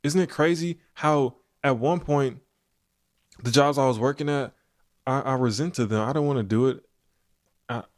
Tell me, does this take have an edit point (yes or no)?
no